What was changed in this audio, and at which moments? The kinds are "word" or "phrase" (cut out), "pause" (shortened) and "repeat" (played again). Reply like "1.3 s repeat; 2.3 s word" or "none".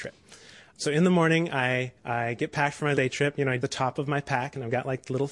2.0 s pause; 2.9 s word; 3.6 s word